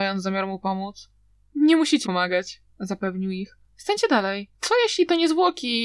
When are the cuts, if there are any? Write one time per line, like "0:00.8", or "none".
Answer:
0:01.3
0:02.0
0:02.7
0:03.7
0:04.5